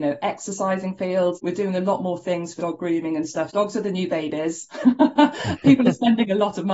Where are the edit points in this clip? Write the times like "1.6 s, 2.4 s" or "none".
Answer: 1.3 s, 2.6 s, 3.5 s